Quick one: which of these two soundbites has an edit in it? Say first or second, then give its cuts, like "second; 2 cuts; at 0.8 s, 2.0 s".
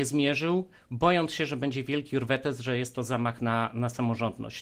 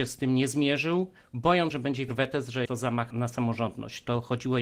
second; 4 cuts; at 1.7 s, 2.1 s, 2.7 s, 3.1 s